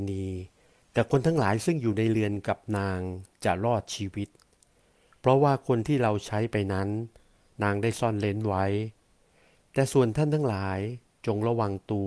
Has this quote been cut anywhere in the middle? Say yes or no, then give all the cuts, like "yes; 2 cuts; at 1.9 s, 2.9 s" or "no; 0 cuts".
no; 0 cuts